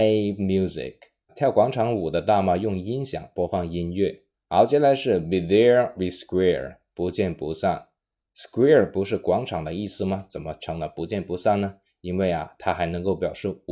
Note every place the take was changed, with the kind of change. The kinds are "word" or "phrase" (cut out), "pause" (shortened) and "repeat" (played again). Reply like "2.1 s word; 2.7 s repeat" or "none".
5.9 s word